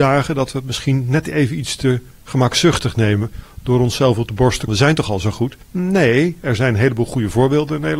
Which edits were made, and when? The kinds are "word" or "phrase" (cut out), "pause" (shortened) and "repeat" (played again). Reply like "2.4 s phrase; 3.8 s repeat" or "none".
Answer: 4.7 s phrase; 5.6 s pause